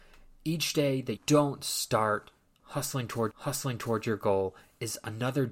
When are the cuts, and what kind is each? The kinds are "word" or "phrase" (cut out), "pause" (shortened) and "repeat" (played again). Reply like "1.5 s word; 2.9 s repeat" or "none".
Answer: 1.2 s word; 3.3 s repeat